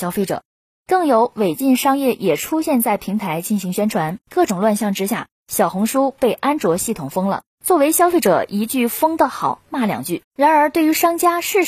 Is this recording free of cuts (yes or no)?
no